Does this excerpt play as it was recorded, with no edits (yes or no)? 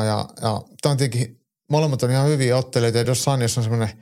yes